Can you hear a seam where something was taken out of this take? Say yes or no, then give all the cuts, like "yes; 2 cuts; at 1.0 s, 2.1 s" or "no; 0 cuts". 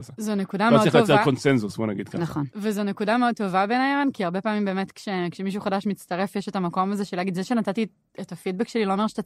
no; 0 cuts